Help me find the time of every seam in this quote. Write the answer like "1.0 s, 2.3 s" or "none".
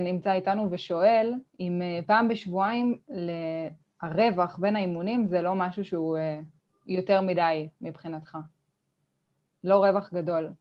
1.5 s, 6.6 s